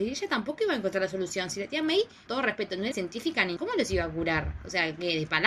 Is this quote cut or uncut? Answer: cut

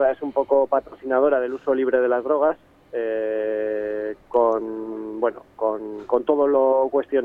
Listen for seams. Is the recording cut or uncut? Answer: uncut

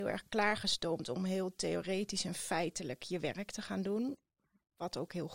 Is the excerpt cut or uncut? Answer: uncut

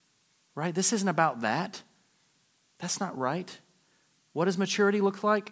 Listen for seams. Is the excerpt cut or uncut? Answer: uncut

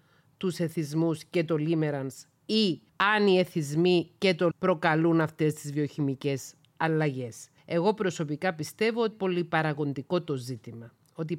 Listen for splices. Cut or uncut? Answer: cut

